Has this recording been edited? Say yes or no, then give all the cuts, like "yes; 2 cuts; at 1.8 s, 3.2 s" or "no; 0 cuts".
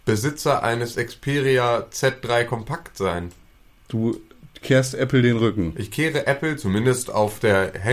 no; 0 cuts